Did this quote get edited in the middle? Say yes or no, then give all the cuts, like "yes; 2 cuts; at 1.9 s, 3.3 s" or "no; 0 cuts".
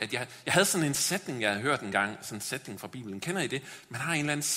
no; 0 cuts